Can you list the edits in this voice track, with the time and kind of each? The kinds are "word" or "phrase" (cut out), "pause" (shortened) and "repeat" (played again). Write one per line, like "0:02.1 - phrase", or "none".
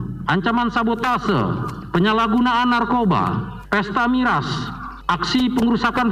none